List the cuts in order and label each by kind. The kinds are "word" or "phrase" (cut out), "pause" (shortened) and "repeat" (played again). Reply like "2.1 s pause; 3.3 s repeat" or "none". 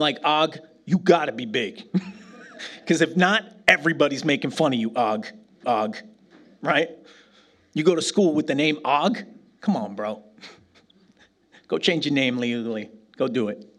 5.6 s repeat